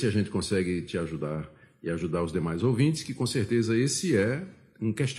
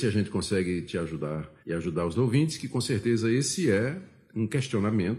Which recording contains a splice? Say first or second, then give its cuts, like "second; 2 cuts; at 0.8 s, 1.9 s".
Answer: second; 2 cuts; at 1.6 s, 2.1 s